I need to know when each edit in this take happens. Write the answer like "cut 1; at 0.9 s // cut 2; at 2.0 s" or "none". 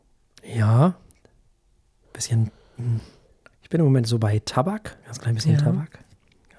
cut 1; at 5.0 s